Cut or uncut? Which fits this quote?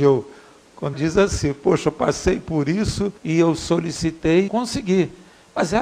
cut